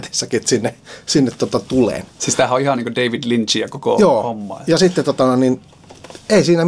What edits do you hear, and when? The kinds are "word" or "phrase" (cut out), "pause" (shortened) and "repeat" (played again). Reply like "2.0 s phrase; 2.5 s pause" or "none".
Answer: none